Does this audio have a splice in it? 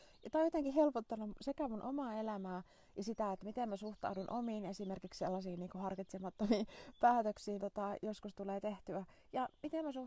yes; 1 cut; at 7.6 s

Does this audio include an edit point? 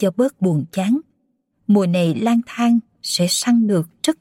no; 0 cuts

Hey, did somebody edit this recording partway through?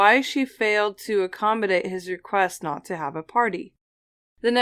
no; 0 cuts

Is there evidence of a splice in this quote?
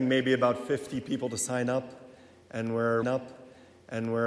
yes; 1 cut; at 3.0 s

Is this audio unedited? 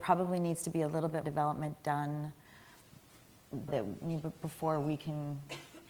no; 2 cuts; at 1.2 s, 3.7 s

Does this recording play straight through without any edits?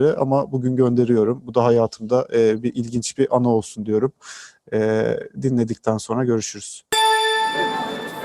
yes; 0 cuts

